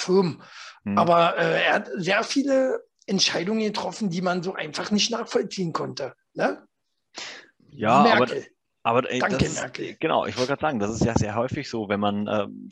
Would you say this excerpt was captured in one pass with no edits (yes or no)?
yes